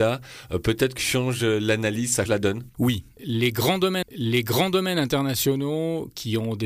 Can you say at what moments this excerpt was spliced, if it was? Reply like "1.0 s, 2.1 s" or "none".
1.0 s, 2.3 s, 4.0 s